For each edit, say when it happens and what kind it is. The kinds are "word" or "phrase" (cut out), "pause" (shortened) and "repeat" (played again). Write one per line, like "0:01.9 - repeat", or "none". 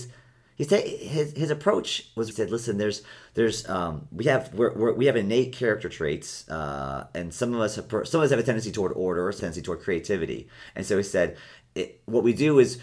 0:02.3 - phrase
0:09.4 - phrase